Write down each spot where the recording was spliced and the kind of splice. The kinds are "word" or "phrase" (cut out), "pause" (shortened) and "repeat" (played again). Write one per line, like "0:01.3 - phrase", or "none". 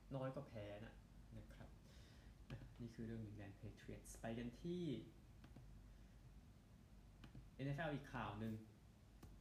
none